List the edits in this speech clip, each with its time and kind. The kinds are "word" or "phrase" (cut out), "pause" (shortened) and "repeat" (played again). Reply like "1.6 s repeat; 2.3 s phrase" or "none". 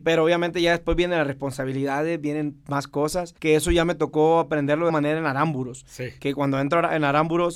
3.4 s pause; 4.9 s word